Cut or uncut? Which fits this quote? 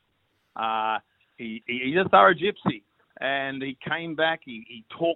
uncut